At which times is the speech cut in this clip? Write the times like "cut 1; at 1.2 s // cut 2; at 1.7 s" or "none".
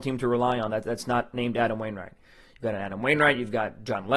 none